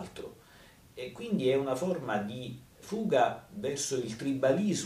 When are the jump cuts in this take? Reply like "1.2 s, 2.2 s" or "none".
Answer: 2.8 s